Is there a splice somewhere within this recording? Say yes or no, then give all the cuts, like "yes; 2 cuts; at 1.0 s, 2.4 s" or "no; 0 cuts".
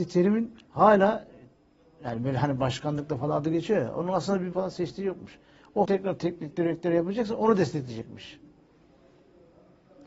yes; 2 cuts; at 4.5 s, 5.9 s